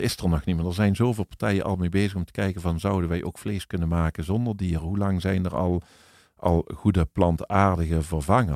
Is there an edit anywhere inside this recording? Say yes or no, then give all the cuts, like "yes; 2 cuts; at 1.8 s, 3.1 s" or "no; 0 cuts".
no; 0 cuts